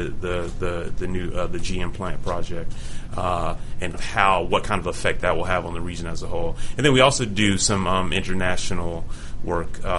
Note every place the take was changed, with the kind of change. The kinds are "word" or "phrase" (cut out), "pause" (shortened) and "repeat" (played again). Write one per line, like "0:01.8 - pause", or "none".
0:03.9 - word